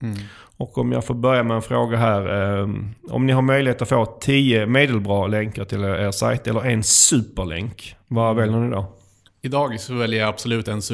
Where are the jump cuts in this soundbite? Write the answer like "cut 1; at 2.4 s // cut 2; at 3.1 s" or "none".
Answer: none

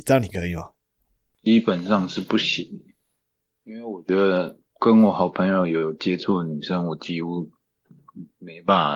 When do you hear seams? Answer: cut 1; at 4.7 s

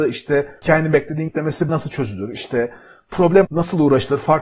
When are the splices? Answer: cut 1; at 1.3 s // cut 2; at 1.7 s // cut 3; at 3.4 s

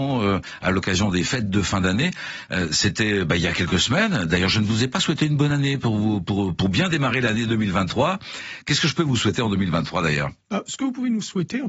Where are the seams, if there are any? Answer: cut 1; at 10.4 s

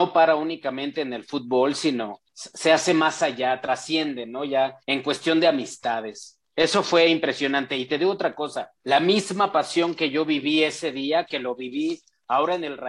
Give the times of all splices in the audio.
cut 1; at 2.3 s // cut 2; at 4.8 s // cut 3; at 8.8 s

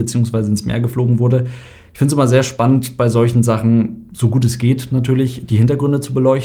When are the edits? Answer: none

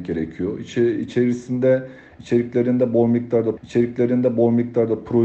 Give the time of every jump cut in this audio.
cut 1; at 3.6 s

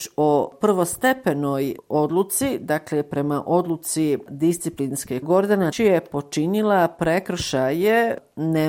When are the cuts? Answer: cut 1; at 5.2 s // cut 2; at 5.7 s

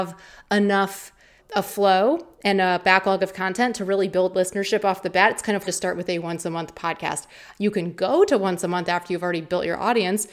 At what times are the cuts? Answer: cut 1; at 1.4 s // cut 2; at 5.6 s

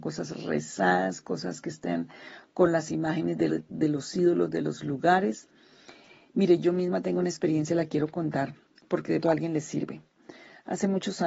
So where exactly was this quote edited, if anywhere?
cut 1; at 3.5 s // cut 2; at 8.7 s // cut 3; at 9.2 s

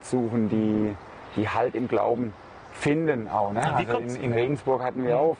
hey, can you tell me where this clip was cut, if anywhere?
none

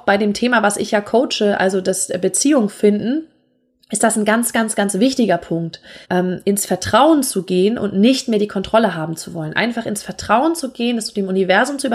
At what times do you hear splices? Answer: cut 1; at 6.0 s

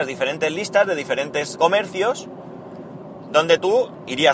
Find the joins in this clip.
cut 1; at 1.6 s

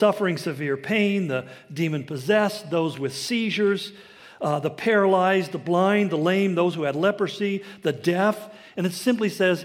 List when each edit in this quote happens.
none

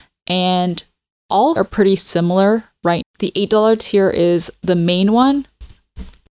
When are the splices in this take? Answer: cut 1; at 1.6 s // cut 2; at 3.0 s

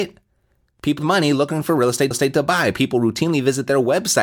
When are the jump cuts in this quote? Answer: cut 1; at 1.0 s // cut 2; at 2.1 s

